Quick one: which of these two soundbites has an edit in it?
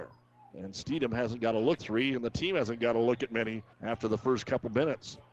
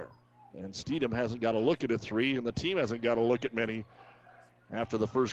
first; 2 cuts; at 1.8 s, 3.7 s

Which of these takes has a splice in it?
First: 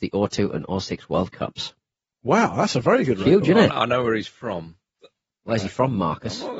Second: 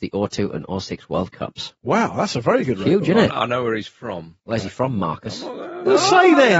second; 2 cuts; at 1.8 s, 4.4 s

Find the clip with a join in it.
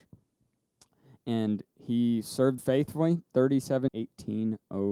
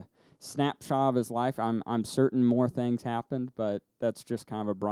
first; 2 cuts; at 2.6 s, 3.9 s

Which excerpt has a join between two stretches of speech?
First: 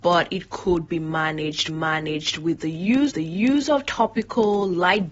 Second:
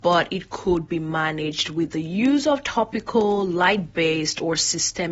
first; 2 cuts; at 1.7 s, 3.1 s

